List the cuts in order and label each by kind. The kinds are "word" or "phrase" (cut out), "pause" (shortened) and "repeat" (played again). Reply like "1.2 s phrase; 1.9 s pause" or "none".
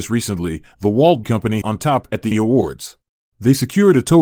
1.2 s word; 1.6 s phrase; 2.3 s word; 3.1 s pause